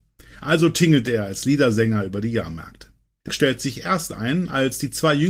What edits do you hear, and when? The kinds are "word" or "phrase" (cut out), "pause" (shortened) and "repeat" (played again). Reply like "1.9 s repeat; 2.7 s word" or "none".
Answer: 3.3 s word